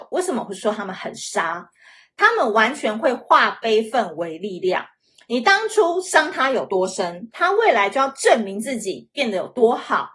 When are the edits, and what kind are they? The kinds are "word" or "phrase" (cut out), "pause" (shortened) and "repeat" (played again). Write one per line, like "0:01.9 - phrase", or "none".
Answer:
none

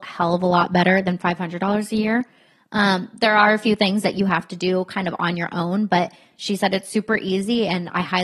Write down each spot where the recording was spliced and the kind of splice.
none

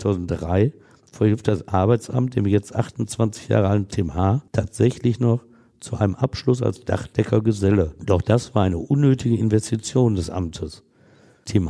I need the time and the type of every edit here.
0:04.5 - pause

